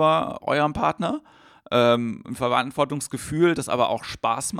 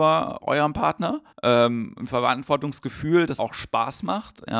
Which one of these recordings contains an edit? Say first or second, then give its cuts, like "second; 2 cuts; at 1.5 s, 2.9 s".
second; 2 cuts; at 1.3 s, 3.4 s